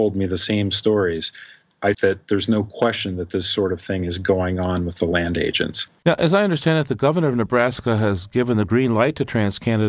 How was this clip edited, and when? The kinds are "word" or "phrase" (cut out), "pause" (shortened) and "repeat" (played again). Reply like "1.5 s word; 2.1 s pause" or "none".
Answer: 1.9 s word; 6.0 s pause

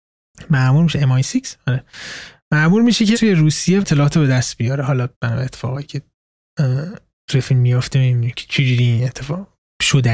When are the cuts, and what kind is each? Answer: 3.1 s word; 3.8 s phrase; 5.1 s pause; 7.2 s pause

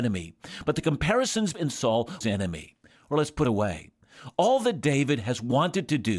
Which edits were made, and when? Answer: 1.5 s phrase; 2.2 s phrase; 3.4 s phrase

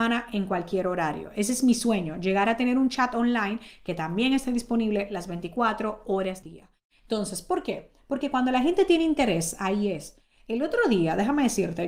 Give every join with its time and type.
6.4 s word

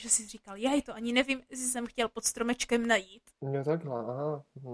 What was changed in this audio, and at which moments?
3.3 s pause

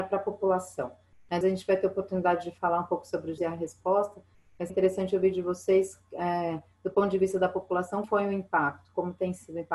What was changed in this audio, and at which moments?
1.4 s word; 3.4 s word; 4.7 s word; 8.0 s word

